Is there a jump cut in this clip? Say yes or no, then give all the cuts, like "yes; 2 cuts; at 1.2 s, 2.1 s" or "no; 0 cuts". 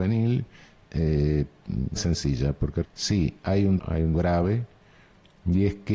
yes; 5 cuts; at 2.0 s, 2.8 s, 3.4 s, 3.8 s, 4.1 s